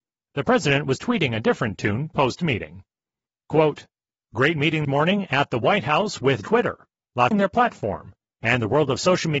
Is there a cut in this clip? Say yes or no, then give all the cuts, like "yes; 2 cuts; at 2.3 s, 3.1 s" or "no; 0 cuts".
yes; 3 cuts; at 4.8 s, 6.4 s, 7.3 s